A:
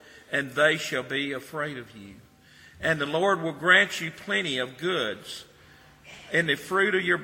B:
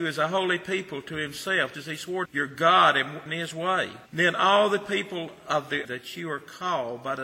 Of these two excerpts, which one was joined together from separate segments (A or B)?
B